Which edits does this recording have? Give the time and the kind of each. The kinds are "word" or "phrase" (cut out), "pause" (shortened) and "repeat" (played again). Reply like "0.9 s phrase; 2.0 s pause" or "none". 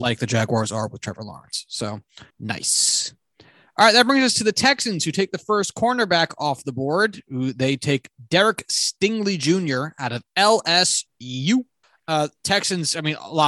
2.3 s pause; 11.8 s pause